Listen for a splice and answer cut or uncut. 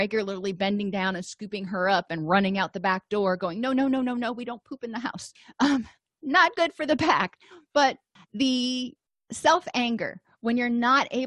uncut